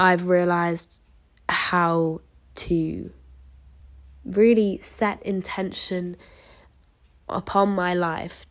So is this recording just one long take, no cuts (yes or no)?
yes